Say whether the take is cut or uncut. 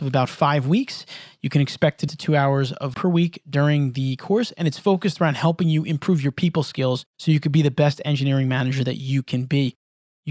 cut